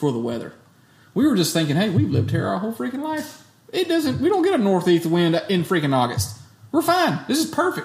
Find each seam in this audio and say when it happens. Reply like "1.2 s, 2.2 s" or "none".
none